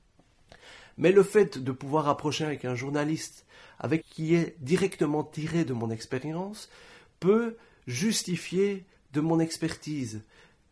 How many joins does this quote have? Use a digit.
1